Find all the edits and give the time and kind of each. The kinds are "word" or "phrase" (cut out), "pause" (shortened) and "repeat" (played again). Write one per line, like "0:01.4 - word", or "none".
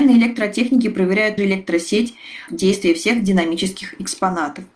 0:01.4 - word
0:02.5 - phrase